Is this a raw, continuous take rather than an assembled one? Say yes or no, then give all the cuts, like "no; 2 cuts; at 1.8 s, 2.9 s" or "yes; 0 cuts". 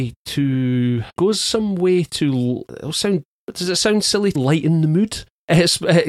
no; 2 cuts; at 1.2 s, 4.3 s